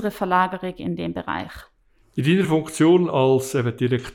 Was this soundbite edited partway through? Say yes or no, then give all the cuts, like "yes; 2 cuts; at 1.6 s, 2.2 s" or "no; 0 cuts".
no; 0 cuts